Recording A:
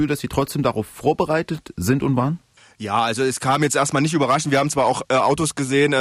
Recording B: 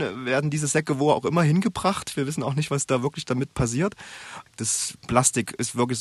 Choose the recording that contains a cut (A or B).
A